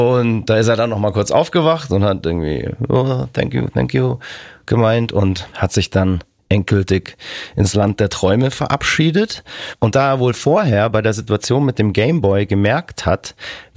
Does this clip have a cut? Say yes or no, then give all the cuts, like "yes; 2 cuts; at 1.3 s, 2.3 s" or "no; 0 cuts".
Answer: no; 0 cuts